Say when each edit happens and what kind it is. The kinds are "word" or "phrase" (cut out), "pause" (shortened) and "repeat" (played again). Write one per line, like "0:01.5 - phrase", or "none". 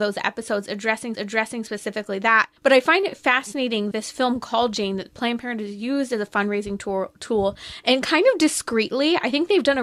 0:01.1 - repeat
0:02.6 - pause
0:03.9 - word